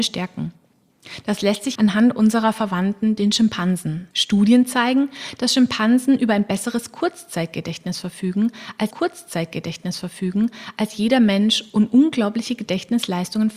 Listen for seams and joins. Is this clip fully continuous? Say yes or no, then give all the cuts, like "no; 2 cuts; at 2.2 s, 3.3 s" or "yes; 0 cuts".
no; 3 cuts; at 1.8 s, 4.1 s, 8.9 s